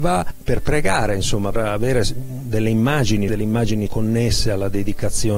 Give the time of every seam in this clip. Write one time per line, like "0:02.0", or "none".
0:01.5
0:03.3
0:03.9